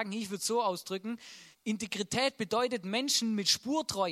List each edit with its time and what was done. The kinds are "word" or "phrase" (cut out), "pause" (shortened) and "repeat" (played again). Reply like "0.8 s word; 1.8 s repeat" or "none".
1.5 s pause